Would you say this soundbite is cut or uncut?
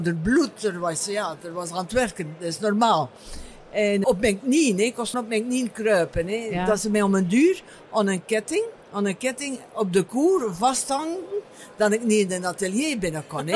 cut